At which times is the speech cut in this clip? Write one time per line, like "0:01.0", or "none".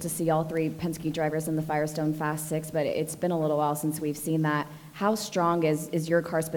none